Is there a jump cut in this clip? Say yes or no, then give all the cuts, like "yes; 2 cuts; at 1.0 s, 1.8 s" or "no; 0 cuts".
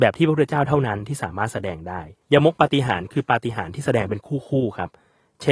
yes; 1 cut; at 2.2 s